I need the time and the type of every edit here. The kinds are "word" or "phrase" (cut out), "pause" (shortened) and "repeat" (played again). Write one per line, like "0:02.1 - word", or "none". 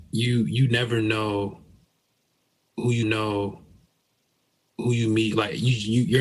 0:03.0 - repeat